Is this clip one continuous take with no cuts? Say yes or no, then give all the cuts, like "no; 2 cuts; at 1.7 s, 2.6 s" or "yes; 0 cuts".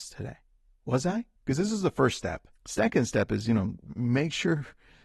no; 2 cuts; at 1.4 s, 2.6 s